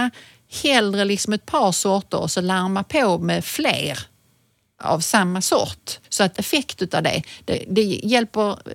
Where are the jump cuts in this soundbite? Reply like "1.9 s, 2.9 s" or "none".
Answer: 6.0 s, 6.4 s